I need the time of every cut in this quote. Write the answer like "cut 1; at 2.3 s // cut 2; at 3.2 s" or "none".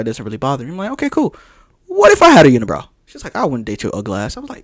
none

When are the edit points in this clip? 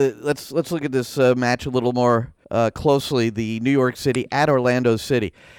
cut 1; at 2.4 s

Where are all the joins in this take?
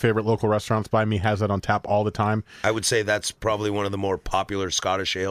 none

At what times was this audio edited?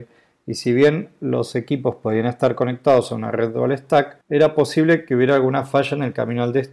cut 1; at 4.2 s

